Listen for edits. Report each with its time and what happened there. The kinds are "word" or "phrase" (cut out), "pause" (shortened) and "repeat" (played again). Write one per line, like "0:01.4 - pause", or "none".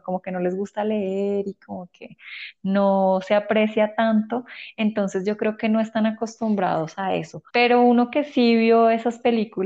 0:07.5 - pause

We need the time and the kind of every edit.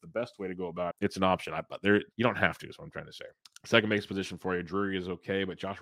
0:00.9 - phrase
0:02.1 - pause
0:03.4 - pause

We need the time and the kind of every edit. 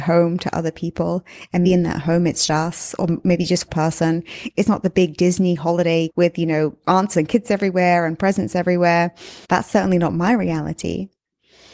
0:01.6 - word
0:02.5 - word
0:03.7 - phrase
0:06.1 - word
0:07.1 - phrase
0:09.4 - pause

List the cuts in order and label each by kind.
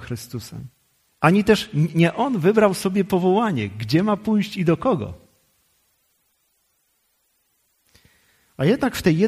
0:01.1 - pause

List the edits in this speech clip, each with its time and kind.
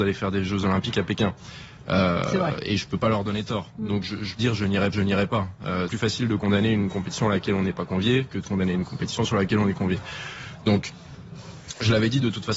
0:04.4 - phrase
0:04.9 - repeat
0:05.9 - word

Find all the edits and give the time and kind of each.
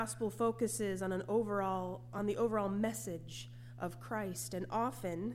none

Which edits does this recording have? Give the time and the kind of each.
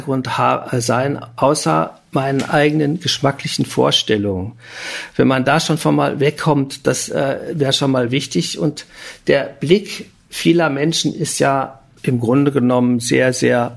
none

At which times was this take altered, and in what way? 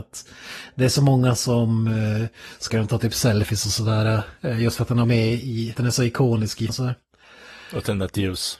0:02.7 - word
0:05.0 - word
0:05.7 - word
0:06.7 - word

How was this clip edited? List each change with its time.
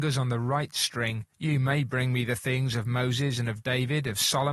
0:01.3 - pause

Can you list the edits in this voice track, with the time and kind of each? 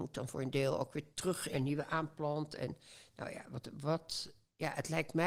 0:01.5 - phrase

